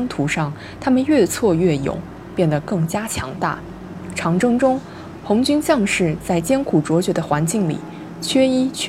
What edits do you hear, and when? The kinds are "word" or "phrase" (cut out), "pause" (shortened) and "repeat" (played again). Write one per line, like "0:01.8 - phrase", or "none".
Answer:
none